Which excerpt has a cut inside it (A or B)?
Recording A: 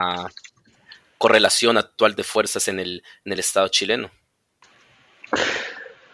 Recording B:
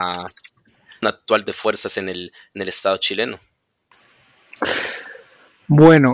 B